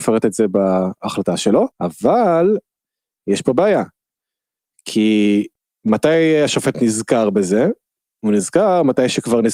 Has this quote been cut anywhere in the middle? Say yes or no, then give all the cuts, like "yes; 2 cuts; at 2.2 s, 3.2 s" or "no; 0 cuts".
yes; 3 cuts; at 1.7 s, 5.5 s, 6.7 s